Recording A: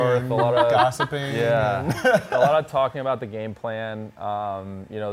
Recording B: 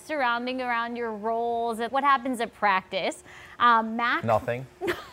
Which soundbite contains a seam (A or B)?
B